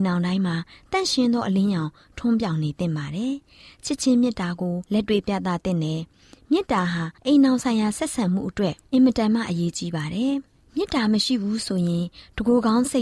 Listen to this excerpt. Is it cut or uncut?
cut